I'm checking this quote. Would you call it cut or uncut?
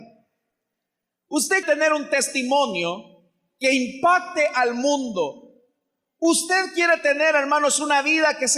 cut